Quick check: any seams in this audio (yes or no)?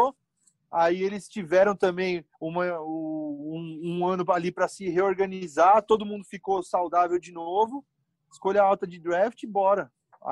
yes